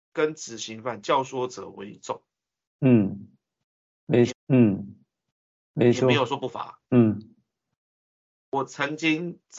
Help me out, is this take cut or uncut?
cut